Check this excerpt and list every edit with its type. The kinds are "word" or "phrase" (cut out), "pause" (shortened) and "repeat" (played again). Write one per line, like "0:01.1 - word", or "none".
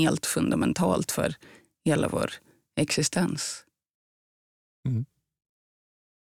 none

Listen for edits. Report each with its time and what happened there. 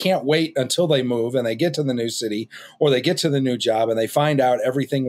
none

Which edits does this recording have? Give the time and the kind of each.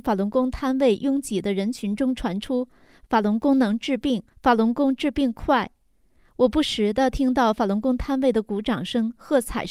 0:04.3 - pause

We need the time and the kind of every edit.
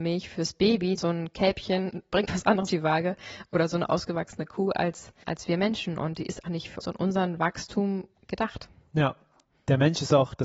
0:01.0 - word
0:02.3 - word
0:02.7 - word
0:05.2 - word
0:06.4 - word
0:06.8 - word

